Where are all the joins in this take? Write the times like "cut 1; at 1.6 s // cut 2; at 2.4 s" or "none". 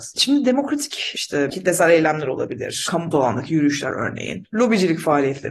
cut 1; at 1.1 s // cut 2; at 3.1 s